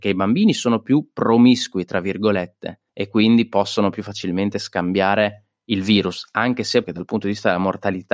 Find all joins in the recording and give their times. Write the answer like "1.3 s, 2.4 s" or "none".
2.9 s, 6.8 s